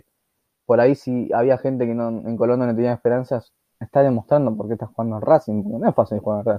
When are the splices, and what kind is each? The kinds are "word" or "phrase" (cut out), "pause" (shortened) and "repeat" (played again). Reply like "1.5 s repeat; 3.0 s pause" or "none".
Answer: none